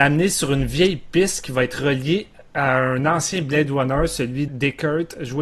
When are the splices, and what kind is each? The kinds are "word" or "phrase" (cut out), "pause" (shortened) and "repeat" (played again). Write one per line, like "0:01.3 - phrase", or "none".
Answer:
0:04.5 - word